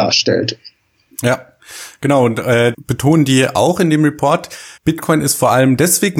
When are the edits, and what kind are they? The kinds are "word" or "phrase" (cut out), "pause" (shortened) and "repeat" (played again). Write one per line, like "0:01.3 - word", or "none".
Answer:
0:02.7 - word
0:04.8 - pause